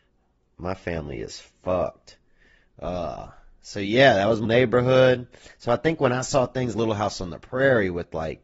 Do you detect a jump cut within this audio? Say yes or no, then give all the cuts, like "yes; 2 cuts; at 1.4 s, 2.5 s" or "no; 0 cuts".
yes; 2 cuts; at 4.4 s, 6.7 s